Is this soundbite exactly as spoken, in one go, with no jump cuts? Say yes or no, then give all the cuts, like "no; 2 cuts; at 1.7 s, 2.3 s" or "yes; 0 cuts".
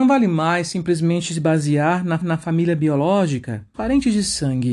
no; 2 cuts; at 2.2 s, 3.7 s